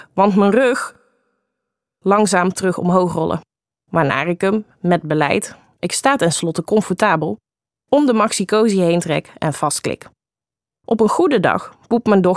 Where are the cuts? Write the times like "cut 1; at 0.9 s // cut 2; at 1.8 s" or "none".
none